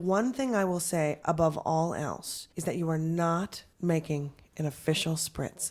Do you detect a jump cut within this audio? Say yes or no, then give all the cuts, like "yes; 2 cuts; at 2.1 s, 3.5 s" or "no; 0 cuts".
yes; 2 cuts; at 2.5 s, 3.7 s